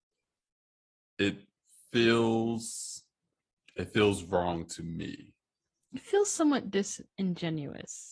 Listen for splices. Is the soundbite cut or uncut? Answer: uncut